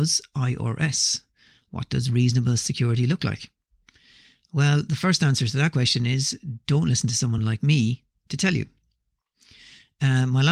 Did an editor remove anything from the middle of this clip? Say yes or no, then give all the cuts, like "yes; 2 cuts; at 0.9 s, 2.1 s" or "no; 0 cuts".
no; 0 cuts